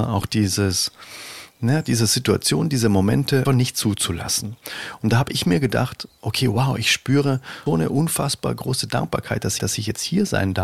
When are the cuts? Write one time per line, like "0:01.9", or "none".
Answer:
0:03.4
0:07.7
0:09.6